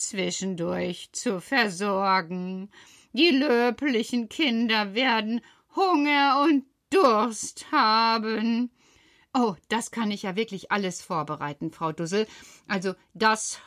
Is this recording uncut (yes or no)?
yes